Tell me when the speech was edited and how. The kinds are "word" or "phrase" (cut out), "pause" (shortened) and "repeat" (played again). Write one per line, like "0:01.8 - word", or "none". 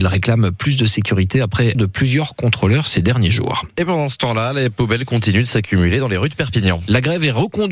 0:01.7 - word